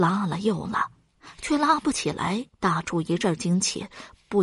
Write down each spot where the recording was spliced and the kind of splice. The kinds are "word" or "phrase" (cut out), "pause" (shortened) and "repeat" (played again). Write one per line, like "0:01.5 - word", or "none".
0:02.5 - pause